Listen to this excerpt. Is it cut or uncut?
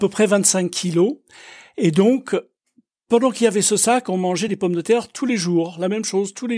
uncut